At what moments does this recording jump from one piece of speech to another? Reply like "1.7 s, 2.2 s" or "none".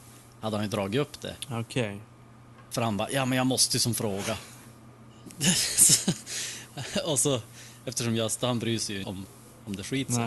9.0 s